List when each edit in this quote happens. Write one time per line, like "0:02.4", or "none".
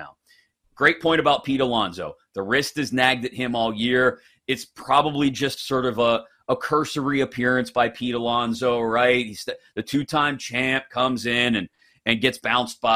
none